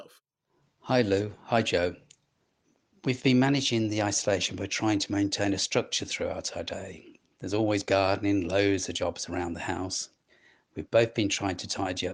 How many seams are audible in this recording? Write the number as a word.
zero